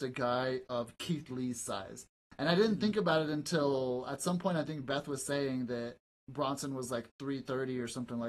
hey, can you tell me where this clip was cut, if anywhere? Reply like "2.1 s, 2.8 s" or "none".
6.2 s